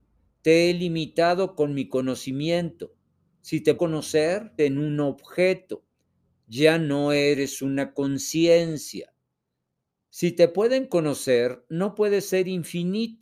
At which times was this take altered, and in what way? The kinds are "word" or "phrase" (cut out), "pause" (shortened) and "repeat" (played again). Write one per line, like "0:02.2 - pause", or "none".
0:03.8 - word
0:04.6 - phrase